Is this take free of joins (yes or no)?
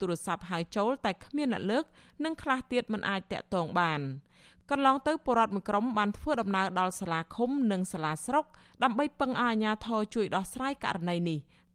yes